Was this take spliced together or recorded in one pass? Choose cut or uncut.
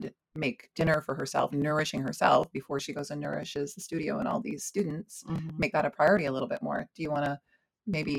uncut